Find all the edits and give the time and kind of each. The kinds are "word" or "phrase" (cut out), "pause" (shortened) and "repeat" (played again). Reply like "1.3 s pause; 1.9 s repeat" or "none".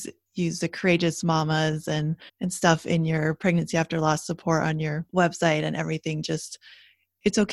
2.3 s pause; 5.1 s pause